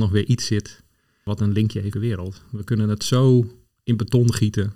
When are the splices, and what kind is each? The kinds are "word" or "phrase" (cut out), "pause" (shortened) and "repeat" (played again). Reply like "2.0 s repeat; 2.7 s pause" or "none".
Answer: 1.9 s phrase